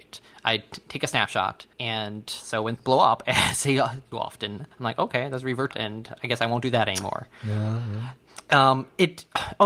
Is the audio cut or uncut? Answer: cut